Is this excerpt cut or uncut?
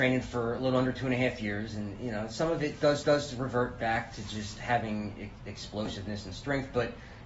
cut